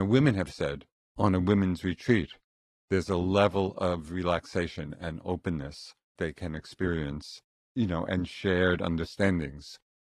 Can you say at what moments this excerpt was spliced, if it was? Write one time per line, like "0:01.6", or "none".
0:01.2
0:06.2